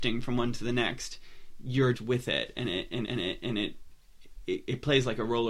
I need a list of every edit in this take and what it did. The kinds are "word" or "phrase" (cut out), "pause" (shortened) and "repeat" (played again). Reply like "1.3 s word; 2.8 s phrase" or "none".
1.9 s word; 3.0 s repeat